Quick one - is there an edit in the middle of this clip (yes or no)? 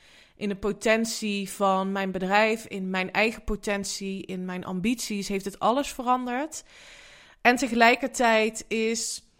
no